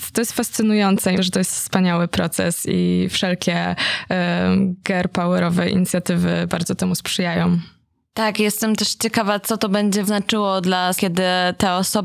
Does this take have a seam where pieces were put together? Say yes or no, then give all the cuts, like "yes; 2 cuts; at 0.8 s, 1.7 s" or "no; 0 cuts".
yes; 3 cuts; at 1.2 s, 10.0 s, 11.0 s